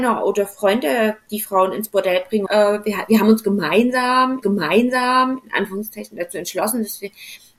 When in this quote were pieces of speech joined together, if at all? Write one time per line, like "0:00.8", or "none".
0:02.5
0:04.4